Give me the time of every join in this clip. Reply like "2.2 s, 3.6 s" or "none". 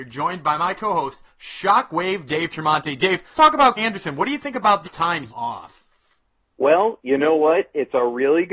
3.3 s, 3.8 s, 4.8 s, 5.3 s